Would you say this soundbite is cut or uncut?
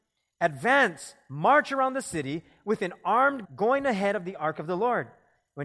cut